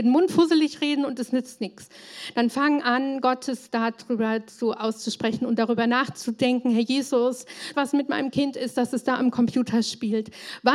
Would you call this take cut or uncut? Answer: cut